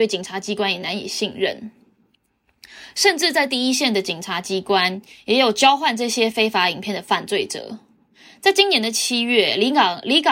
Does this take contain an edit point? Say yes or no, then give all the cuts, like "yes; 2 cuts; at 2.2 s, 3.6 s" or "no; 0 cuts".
no; 0 cuts